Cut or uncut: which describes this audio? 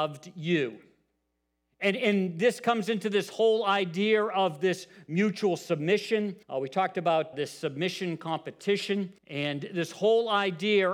cut